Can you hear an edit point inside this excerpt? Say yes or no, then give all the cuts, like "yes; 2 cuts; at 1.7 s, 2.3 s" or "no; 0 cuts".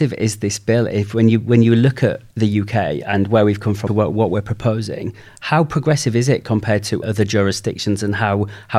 yes; 2 cuts; at 3.9 s, 7.0 s